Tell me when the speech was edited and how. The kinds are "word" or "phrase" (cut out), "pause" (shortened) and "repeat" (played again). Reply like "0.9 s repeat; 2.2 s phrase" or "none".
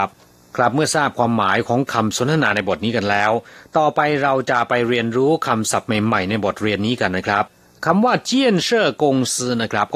none